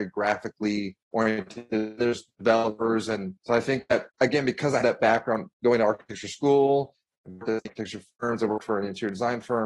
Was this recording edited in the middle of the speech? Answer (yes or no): yes